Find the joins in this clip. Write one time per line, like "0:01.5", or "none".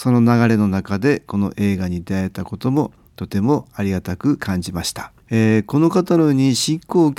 0:05.2